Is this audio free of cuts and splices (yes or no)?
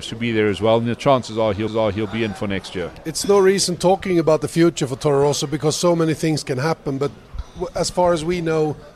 no